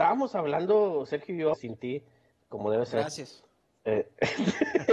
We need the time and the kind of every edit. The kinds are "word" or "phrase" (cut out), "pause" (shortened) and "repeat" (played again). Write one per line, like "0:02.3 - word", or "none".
0:01.5 - word